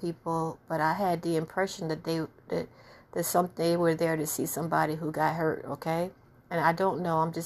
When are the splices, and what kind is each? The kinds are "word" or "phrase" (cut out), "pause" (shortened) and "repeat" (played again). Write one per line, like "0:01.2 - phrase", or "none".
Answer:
none